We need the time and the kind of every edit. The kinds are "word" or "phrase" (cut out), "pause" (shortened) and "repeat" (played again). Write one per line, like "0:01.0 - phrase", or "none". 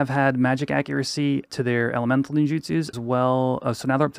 0:01.5 - word
0:02.9 - word